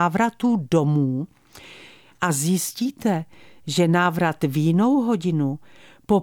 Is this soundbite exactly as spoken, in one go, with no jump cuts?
yes; 0 cuts

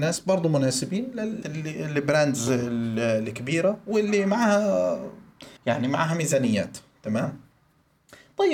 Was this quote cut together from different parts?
yes; 2 cuts; at 1.4 s, 5.6 s

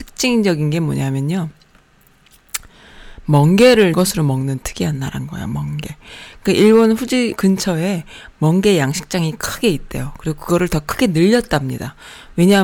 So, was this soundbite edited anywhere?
yes; 2 cuts; at 3.9 s, 7.3 s

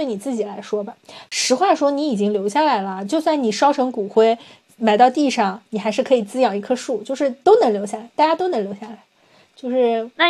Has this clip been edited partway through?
no; 0 cuts

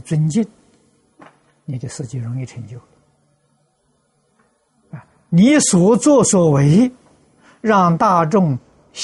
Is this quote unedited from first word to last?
yes; 0 cuts

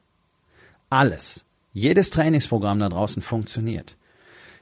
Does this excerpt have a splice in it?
no; 0 cuts

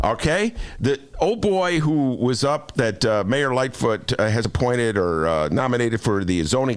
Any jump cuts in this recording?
no; 0 cuts

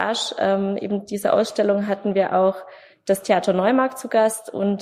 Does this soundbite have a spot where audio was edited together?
no; 0 cuts

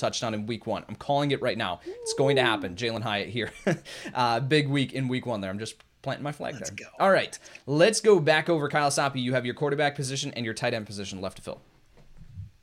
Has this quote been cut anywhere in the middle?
no; 0 cuts

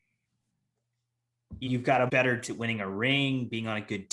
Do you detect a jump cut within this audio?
yes; 3 cuts; at 1.6 s, 2.1 s, 2.4 s

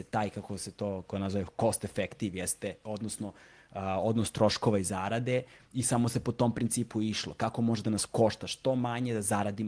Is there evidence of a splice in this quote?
no; 0 cuts

